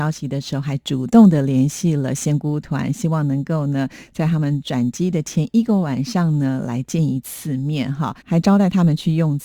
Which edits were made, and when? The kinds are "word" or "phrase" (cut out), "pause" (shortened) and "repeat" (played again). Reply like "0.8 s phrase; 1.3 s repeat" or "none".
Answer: 8.2 s pause